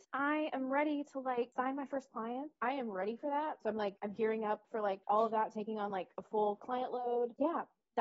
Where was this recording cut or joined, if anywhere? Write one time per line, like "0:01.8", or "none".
none